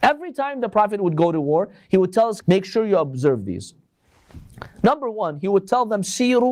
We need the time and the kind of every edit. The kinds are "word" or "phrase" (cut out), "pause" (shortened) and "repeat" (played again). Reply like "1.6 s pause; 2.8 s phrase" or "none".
2.4 s word